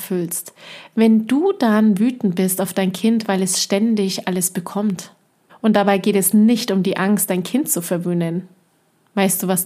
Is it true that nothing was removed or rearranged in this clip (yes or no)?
no